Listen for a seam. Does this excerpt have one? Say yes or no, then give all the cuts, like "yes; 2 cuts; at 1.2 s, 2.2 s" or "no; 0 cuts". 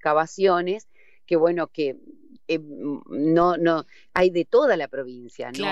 no; 0 cuts